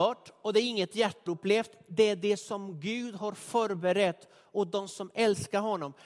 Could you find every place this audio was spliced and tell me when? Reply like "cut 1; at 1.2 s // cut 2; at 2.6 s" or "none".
cut 1; at 1.3 s

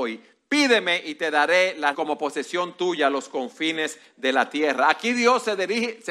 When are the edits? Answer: cut 1; at 1.9 s

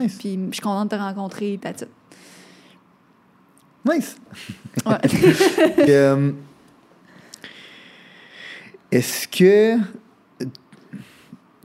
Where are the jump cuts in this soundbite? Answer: cut 1; at 1.6 s // cut 2; at 5.9 s

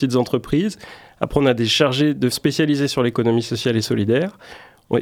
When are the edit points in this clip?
cut 1; at 2.3 s

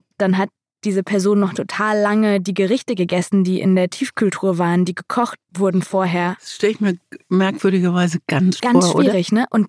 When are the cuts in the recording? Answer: cut 1; at 5.4 s // cut 2; at 8.6 s

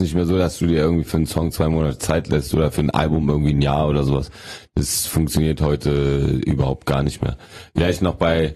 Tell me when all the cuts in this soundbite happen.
none

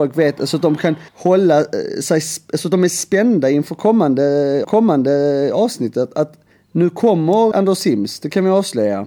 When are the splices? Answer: cut 1; at 1.1 s // cut 2; at 4.6 s // cut 3; at 6.5 s // cut 4; at 7.5 s

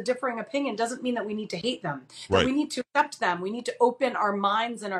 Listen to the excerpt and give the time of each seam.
cut 1; at 2.9 s

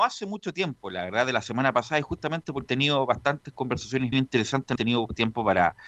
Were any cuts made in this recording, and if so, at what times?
cut 1; at 2.7 s // cut 2; at 4.1 s // cut 3; at 4.8 s

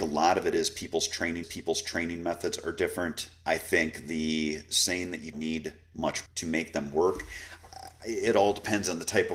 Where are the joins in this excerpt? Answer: cut 1; at 1.4 s // cut 2; at 5.3 s // cut 3; at 6.3 s

